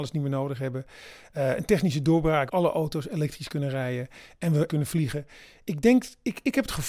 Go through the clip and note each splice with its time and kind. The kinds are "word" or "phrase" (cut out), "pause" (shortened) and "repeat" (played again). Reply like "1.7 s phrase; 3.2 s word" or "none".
2.5 s word; 4.7 s word